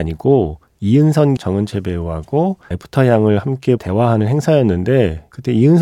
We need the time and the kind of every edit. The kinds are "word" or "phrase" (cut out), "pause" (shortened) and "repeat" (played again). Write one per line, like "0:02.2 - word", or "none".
0:01.4 - word
0:02.7 - word
0:03.8 - phrase